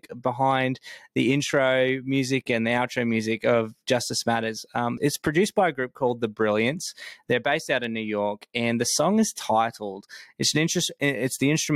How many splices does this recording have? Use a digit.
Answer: 1